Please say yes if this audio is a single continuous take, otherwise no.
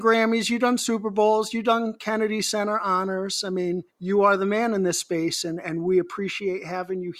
no